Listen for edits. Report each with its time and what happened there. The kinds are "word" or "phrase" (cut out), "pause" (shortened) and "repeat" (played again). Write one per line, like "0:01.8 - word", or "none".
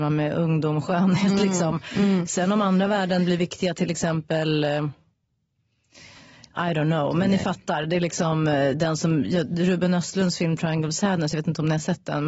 none

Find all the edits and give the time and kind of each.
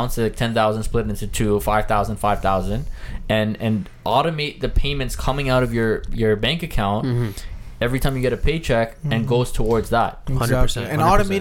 none

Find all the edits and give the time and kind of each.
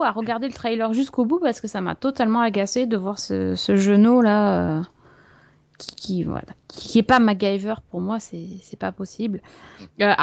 none

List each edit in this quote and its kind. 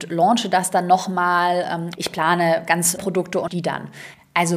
0:01.9 - word
0:03.0 - word
0:03.5 - word

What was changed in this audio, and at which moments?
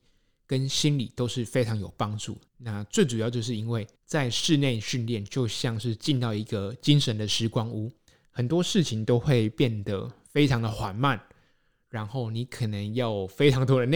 0:02.5 - pause
0:04.0 - pause

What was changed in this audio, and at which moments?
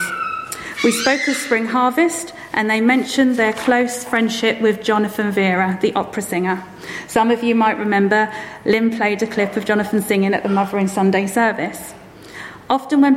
none

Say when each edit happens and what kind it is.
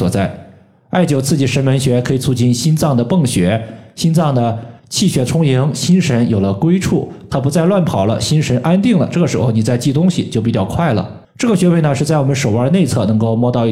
0:04.8 - pause

